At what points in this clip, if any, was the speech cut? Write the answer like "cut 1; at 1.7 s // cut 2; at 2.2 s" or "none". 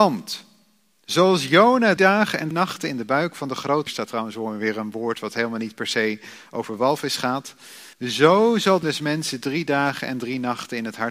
cut 1; at 2.0 s // cut 2; at 2.5 s // cut 3; at 3.9 s // cut 4; at 7.9 s // cut 5; at 8.8 s